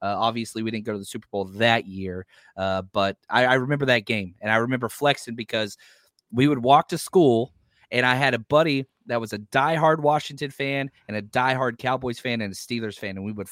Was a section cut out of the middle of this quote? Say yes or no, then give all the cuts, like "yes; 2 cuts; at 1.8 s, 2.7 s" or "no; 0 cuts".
no; 0 cuts